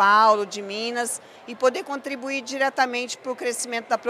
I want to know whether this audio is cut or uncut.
uncut